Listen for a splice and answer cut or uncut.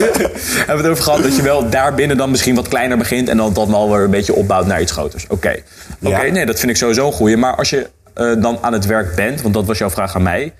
uncut